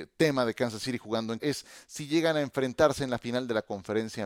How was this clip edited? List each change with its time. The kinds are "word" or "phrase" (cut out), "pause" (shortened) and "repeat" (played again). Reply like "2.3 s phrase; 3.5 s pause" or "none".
1.4 s word